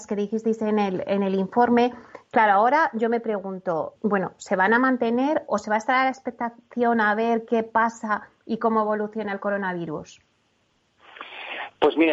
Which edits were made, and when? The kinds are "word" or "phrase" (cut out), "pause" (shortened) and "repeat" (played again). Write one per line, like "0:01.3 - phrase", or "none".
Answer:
0:03.9 - word
0:05.5 - word